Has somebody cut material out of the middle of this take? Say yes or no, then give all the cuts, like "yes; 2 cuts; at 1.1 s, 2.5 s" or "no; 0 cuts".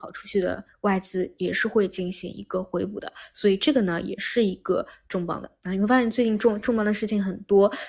no; 0 cuts